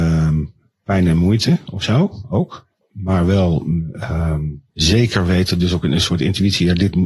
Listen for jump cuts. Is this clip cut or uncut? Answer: cut